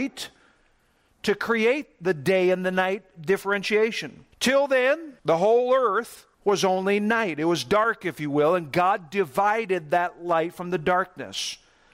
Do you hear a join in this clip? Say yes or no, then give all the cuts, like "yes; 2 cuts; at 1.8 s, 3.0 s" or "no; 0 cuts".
yes; 3 cuts; at 4.3 s, 5.2 s, 6.3 s